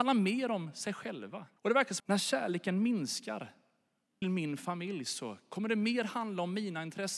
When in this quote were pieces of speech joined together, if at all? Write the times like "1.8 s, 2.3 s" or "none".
1.6 s, 2.0 s, 4.2 s